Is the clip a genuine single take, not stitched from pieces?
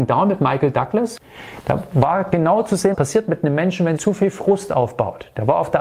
no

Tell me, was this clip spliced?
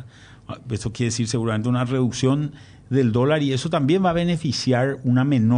no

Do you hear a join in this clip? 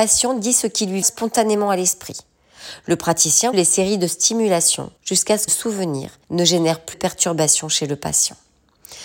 yes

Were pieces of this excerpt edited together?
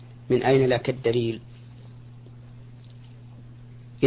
no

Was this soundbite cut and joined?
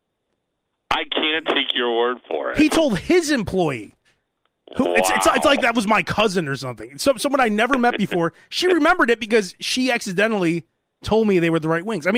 no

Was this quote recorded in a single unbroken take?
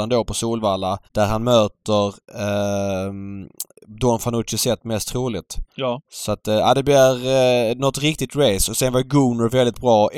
no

